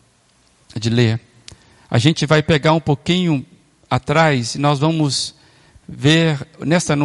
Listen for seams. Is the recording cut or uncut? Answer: uncut